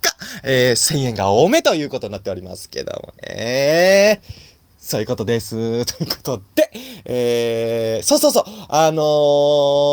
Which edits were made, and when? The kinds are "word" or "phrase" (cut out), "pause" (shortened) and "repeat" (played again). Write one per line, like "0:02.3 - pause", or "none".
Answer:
0:03.2 - pause